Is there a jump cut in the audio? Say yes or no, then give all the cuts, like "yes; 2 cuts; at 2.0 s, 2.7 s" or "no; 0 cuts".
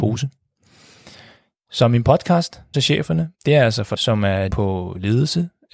yes; 4 cuts; at 2.7 s, 3.3 s, 4.0 s, 4.5 s